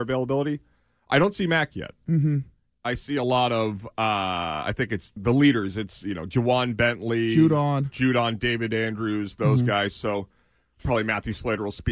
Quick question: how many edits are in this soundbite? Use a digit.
1